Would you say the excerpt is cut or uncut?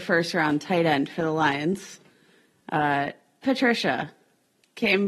cut